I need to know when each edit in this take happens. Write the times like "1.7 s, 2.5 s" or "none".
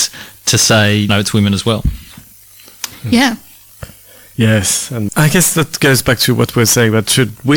1.1 s, 5.1 s